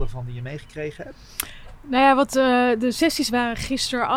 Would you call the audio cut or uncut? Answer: uncut